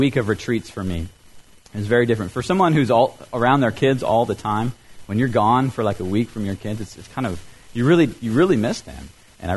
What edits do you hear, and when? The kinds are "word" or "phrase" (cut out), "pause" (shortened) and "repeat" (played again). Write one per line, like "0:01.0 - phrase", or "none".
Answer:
none